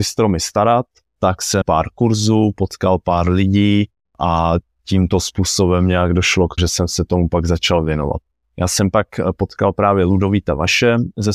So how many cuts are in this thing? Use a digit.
2